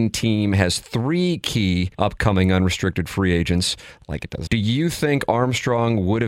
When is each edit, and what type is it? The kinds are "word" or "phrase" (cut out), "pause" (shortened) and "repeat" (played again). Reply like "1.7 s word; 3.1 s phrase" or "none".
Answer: 1.9 s pause; 4.5 s word